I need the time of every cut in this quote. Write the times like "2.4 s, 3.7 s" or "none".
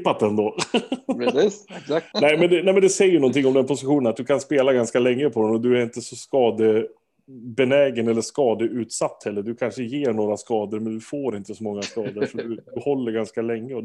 2.1 s